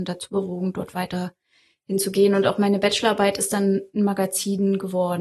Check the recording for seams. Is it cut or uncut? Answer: uncut